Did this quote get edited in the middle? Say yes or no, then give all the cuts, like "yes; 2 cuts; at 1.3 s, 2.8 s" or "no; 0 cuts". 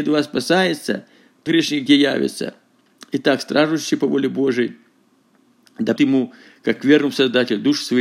yes; 2 cuts; at 1.5 s, 6.0 s